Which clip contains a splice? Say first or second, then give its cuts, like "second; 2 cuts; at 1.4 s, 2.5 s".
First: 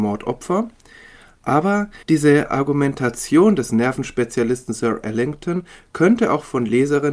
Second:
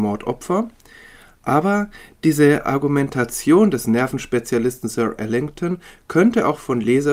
first; 1 cut; at 2.0 s